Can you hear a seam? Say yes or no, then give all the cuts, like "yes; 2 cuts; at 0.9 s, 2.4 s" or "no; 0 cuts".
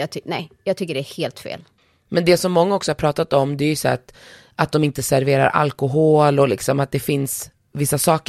no; 0 cuts